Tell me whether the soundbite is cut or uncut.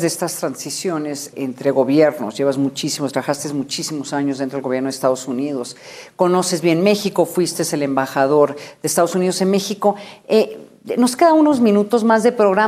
cut